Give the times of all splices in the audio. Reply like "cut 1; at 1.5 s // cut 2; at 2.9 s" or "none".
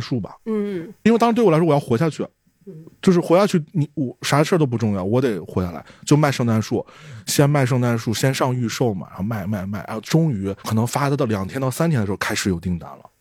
cut 1; at 10.6 s